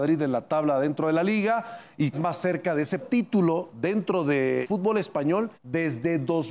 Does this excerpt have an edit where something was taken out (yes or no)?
yes